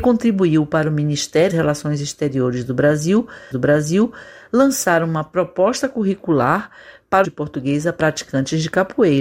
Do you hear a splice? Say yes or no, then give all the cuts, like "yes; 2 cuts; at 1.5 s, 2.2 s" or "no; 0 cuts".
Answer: yes; 3 cuts; at 1.5 s, 3.5 s, 7.2 s